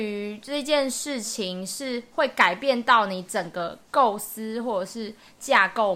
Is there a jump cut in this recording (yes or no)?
yes